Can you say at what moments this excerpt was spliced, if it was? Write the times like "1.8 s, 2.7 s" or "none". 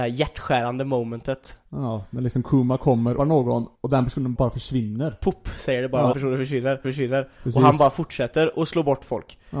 3.2 s, 3.7 s, 4.4 s, 6.1 s, 6.8 s